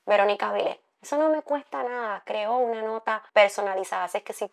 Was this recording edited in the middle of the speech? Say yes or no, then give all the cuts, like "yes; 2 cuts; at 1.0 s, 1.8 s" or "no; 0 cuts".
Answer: yes; 1 cut; at 3.3 s